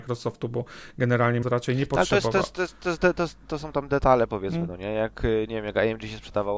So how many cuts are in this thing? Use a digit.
1